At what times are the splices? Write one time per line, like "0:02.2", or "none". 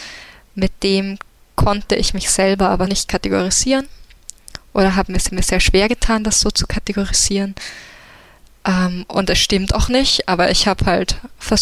0:02.9
0:05.3